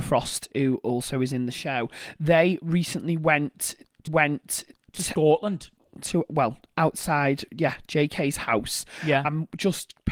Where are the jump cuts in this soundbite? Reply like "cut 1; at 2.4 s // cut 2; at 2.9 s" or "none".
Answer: cut 1; at 4.1 s